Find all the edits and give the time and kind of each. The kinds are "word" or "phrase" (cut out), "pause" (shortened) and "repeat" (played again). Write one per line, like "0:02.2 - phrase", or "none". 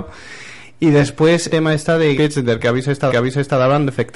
0:01.5 - phrase
0:02.1 - phrase
0:03.1 - repeat